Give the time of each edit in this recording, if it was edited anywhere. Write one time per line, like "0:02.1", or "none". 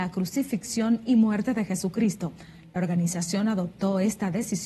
none

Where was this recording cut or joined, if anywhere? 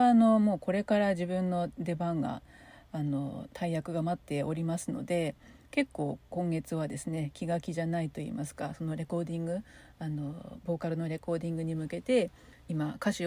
none

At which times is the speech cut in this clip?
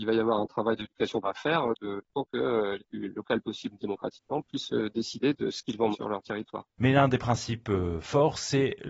0:01.2
0:02.8
0:05.9

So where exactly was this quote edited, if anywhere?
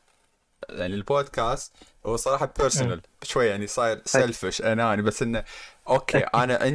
none

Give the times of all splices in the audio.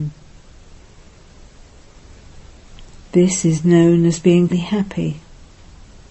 0:04.5

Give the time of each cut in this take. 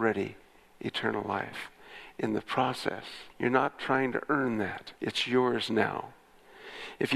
0:03.3
0:05.0

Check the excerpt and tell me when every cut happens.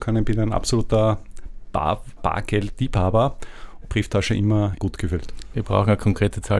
0:02.2
0:03.8
0:04.8

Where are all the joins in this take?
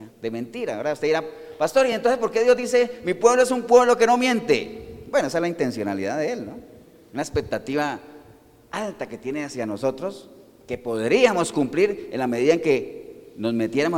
none

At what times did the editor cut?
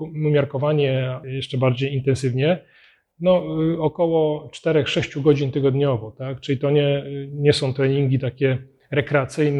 none

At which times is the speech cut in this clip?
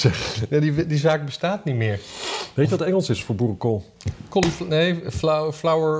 none

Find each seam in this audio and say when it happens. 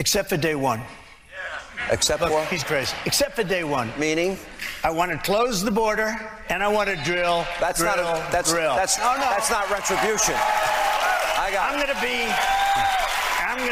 0:02.6
0:09.0

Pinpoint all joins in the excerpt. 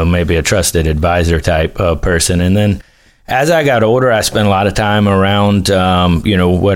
none

